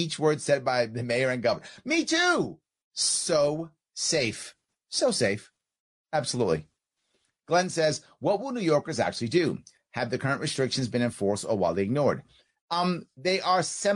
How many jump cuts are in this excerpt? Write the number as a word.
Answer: zero